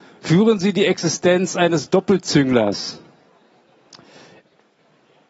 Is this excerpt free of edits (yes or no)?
yes